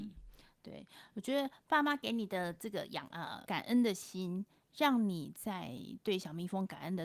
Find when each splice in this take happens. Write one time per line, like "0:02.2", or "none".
0:03.5